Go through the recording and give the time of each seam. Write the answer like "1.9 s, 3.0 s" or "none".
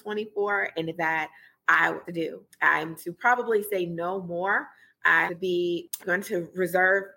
0.9 s, 2.0 s, 3.0 s, 5.3 s, 6.0 s